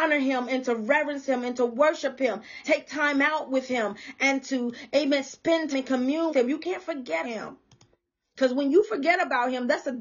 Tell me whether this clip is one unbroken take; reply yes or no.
no